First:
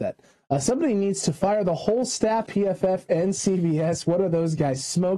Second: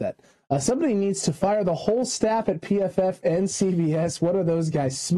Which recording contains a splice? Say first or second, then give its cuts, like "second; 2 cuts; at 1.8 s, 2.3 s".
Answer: first; 1 cut; at 2.5 s